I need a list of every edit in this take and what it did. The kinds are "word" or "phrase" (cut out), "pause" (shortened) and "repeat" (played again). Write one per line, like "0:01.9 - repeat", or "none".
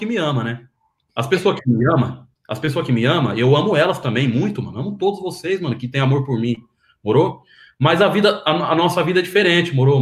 0:02.3 - pause